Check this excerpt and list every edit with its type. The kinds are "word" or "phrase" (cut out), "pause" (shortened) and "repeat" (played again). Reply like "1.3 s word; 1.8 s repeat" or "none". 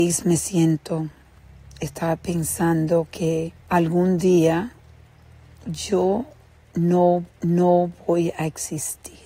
3.6 s pause; 7.3 s repeat